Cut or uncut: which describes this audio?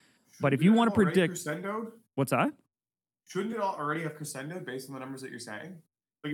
uncut